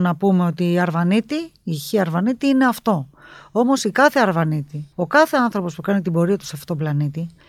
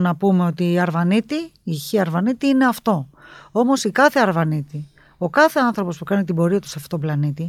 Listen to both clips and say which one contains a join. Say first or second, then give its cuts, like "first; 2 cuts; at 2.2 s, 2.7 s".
first; 1 cut; at 4.9 s